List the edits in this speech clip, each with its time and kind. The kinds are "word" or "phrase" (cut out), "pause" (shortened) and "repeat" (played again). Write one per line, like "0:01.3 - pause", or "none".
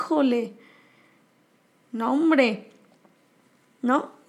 none